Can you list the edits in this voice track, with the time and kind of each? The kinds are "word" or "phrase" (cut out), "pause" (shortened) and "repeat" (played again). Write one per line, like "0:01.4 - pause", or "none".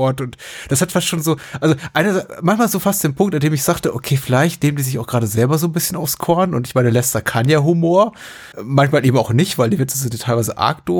0:08.5 - pause